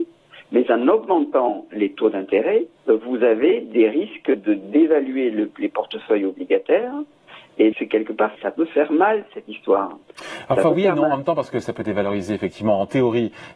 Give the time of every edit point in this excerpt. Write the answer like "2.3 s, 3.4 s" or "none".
2.8 s, 7.7 s, 8.3 s